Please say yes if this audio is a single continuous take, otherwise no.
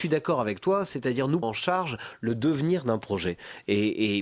no